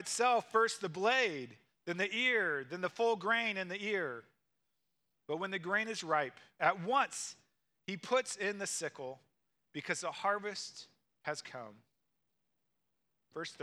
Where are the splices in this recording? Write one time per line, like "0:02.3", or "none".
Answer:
none